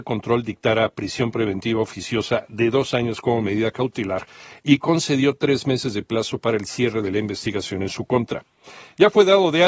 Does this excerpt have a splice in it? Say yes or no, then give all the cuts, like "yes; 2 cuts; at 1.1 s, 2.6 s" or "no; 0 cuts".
no; 0 cuts